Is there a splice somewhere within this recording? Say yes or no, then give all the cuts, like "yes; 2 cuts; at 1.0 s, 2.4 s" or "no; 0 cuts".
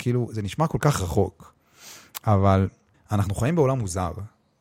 yes; 1 cut; at 2.9 s